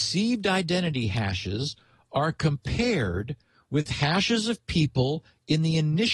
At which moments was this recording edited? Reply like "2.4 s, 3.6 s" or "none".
none